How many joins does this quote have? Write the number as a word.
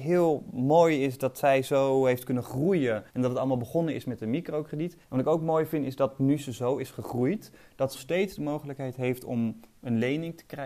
three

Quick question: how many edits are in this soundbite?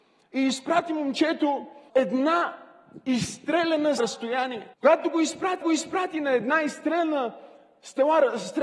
four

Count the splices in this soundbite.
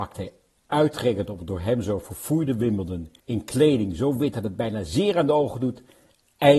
one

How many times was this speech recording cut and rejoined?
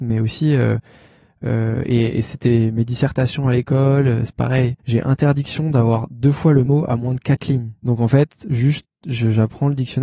three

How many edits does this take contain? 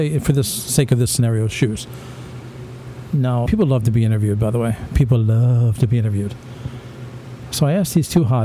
one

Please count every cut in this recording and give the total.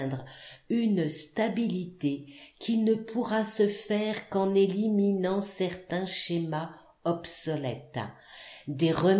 zero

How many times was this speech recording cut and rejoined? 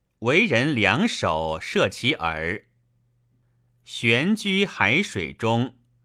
zero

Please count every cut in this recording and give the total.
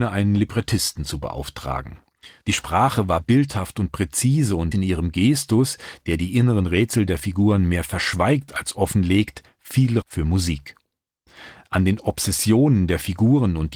two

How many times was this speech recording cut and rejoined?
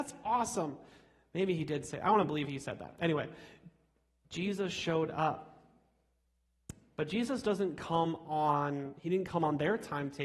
zero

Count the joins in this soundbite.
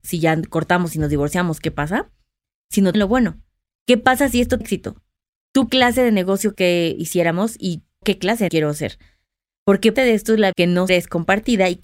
nine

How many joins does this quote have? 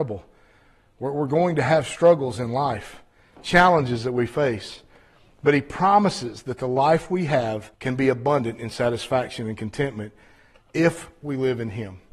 one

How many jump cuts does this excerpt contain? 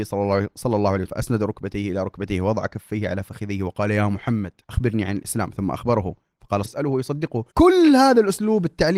four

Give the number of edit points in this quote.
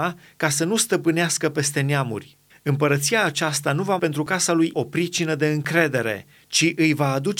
three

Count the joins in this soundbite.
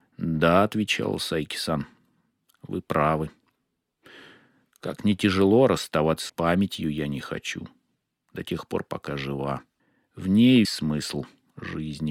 three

